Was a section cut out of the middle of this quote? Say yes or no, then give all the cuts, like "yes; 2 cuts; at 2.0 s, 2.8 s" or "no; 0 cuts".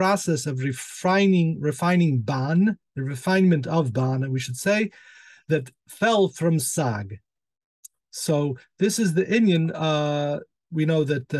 no; 0 cuts